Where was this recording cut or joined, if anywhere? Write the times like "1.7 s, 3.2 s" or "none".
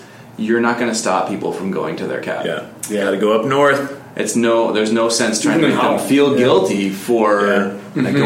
none